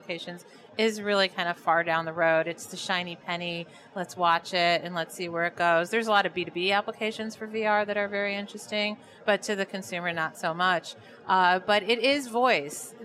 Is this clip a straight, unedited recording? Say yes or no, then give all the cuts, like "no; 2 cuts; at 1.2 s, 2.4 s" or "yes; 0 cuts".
yes; 0 cuts